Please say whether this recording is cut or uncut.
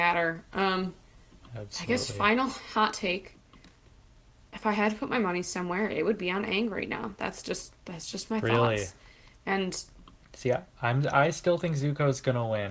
uncut